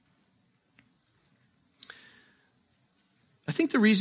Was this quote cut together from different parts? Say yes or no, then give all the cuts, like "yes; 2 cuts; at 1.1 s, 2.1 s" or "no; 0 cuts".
no; 0 cuts